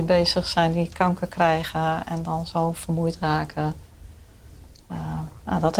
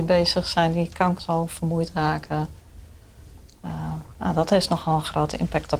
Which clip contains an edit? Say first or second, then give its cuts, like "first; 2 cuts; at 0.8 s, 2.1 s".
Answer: second; 1 cut; at 1.2 s